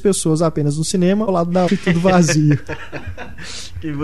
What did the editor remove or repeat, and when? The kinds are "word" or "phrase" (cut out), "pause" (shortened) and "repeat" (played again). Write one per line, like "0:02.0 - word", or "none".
0:01.3 - word
0:01.7 - word